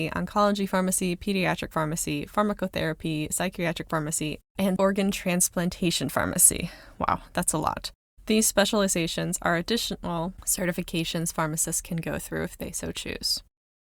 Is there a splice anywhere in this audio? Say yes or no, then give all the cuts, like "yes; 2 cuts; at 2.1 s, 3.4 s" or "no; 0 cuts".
yes; 1 cut; at 4.8 s